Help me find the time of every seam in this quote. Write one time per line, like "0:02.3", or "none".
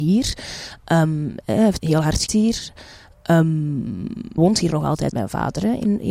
0:01.8
0:02.3
0:04.4
0:05.1

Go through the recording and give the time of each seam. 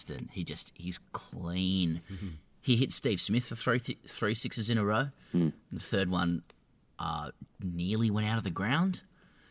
0:07.5

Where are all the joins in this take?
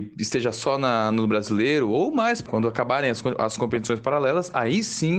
0:02.5

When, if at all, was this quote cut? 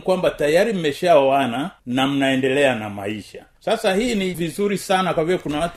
0:01.8
0:03.5
0:04.3

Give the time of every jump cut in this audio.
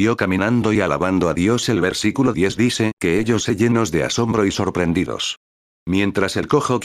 none

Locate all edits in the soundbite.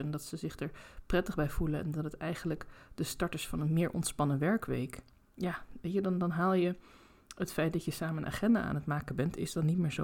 none

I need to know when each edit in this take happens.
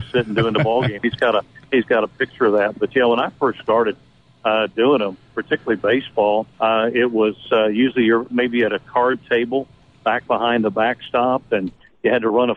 0:06.5

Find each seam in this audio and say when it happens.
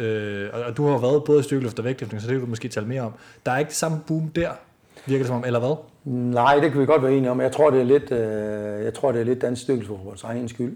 none

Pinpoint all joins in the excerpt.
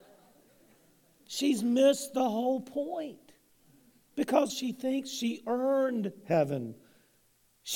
0:04.5

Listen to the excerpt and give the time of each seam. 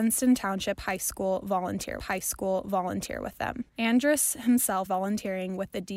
0:02.0
0:03.7
0:04.9

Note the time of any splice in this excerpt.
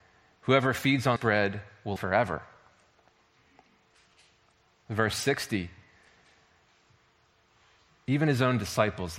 0:01.2
0:02.0

